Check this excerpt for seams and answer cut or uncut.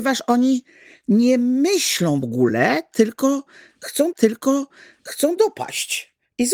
cut